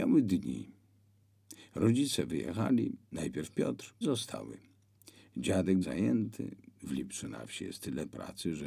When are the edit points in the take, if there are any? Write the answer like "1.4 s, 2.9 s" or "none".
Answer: 4.0 s, 5.8 s